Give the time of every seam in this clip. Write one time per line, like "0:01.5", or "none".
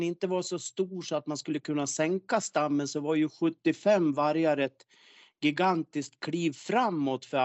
none